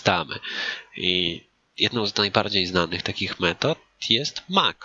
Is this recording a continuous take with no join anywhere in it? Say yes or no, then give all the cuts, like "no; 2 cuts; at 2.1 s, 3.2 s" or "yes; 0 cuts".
yes; 0 cuts